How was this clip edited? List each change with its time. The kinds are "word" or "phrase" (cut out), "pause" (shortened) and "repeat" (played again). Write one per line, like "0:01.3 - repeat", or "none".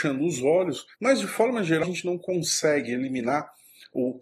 0:00.9 - pause
0:01.8 - word